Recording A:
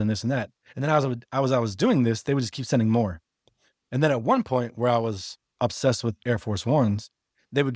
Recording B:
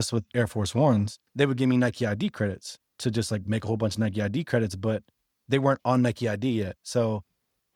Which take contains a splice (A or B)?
B